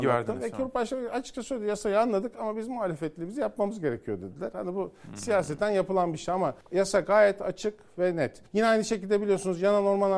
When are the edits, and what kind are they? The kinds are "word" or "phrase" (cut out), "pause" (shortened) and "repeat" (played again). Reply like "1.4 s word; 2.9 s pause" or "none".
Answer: 6.6 s pause; 8.5 s pause